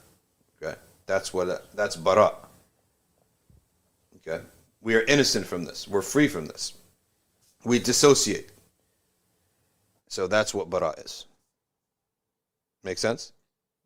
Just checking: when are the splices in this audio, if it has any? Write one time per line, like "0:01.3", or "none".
none